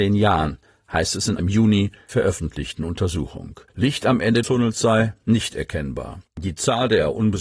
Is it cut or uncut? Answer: cut